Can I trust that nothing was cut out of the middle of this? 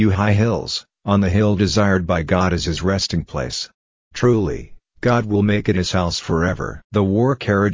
yes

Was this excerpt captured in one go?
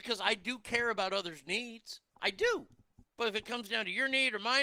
no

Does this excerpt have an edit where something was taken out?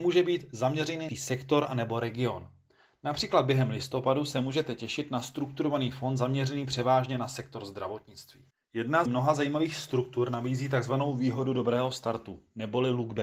yes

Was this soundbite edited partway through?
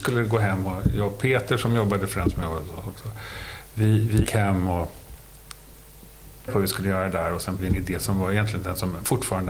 yes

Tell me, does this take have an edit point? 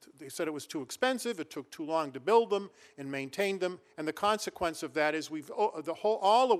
no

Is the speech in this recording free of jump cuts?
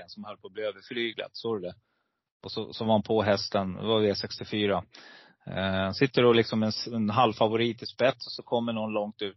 yes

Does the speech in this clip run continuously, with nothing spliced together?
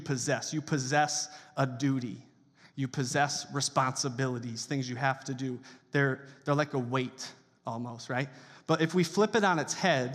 yes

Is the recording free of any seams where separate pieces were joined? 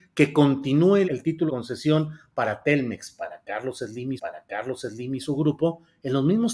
no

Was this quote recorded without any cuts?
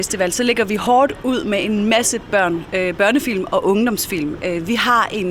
yes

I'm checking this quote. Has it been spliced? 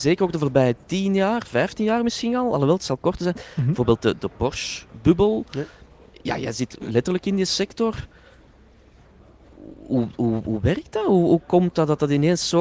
no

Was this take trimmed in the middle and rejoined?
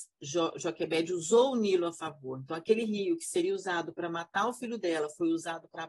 no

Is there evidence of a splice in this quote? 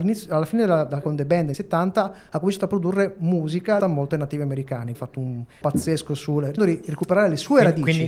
yes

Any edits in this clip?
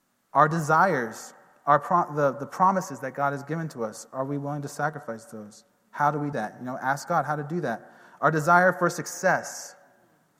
yes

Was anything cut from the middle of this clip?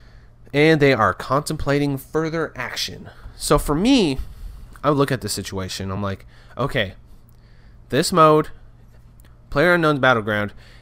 no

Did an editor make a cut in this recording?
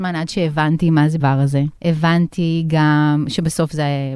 yes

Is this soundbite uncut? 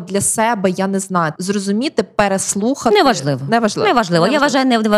no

